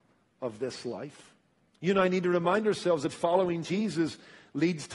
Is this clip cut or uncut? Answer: uncut